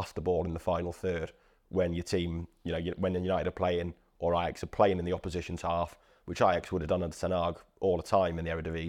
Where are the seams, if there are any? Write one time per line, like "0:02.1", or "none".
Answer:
none